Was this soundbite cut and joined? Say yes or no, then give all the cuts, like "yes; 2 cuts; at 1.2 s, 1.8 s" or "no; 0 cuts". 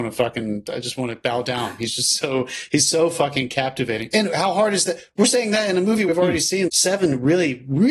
yes; 2 cuts; at 6.1 s, 6.7 s